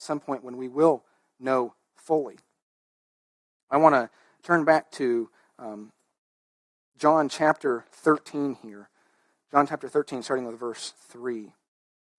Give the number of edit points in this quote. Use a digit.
0